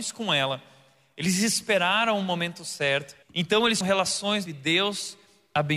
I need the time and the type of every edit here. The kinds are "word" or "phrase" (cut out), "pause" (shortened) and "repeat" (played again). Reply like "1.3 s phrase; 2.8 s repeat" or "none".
3.2 s pause; 3.8 s word; 4.5 s phrase